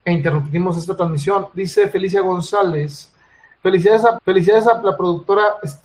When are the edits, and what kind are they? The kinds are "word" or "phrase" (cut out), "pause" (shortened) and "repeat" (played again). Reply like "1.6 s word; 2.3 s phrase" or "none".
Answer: 4.2 s repeat